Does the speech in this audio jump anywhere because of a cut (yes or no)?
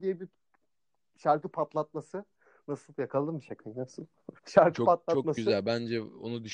yes